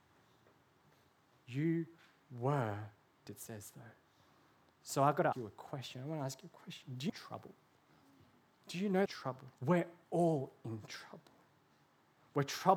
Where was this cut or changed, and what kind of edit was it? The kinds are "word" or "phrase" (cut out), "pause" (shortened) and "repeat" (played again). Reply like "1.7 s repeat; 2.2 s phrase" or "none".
3.3 s word; 5.3 s word; 7.1 s phrase; 9.1 s phrase; 9.6 s pause